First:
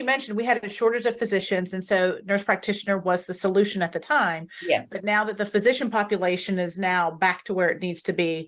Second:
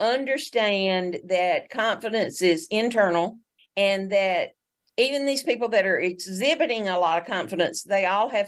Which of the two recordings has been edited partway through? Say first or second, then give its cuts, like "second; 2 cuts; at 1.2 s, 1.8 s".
second; 1 cut; at 3.6 s